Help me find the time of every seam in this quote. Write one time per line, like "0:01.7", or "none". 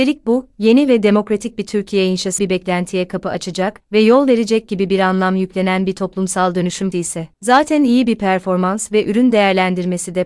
0:02.4
0:03.8
0:06.9